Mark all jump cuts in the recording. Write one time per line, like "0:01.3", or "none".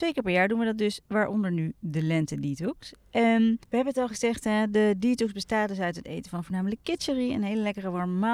0:01.0
0:03.6